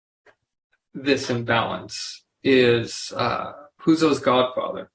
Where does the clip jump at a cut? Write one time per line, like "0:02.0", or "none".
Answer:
0:02.3